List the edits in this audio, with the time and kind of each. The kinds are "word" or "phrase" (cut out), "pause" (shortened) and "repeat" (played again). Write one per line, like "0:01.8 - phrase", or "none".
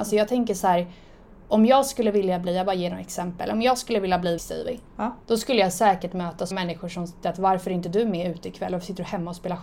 0:04.4 - phrase
0:05.2 - pause
0:06.5 - word
0:07.2 - word

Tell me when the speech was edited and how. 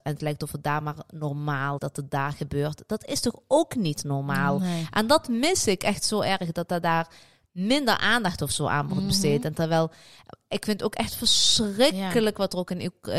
0:01.8 - word

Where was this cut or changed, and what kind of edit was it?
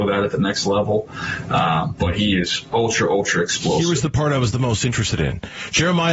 none

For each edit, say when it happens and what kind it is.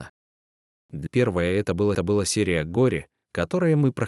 0:01.1 - word
0:01.9 - repeat

